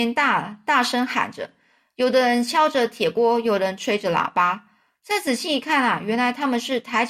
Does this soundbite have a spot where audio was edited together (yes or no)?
no